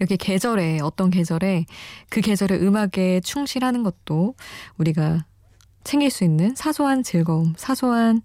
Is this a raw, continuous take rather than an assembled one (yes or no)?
yes